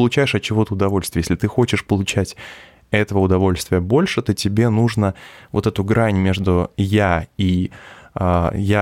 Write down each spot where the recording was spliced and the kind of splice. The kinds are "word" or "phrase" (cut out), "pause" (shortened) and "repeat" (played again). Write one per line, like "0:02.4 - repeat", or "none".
none